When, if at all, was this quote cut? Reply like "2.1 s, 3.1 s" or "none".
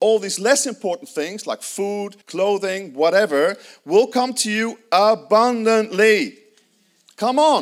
2.2 s